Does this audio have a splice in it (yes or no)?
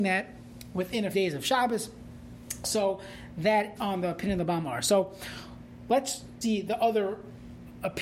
yes